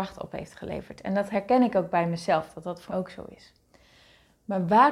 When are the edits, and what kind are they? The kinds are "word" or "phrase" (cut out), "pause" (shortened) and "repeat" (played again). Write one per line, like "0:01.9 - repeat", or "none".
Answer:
0:02.9 - word